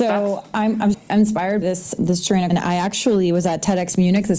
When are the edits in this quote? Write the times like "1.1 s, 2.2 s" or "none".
0.9 s, 1.6 s, 2.0 s, 2.5 s